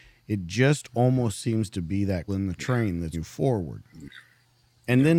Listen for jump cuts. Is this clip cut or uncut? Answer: cut